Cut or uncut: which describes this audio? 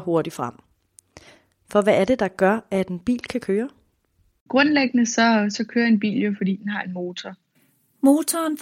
uncut